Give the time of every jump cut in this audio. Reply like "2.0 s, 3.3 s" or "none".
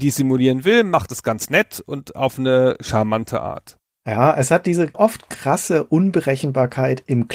none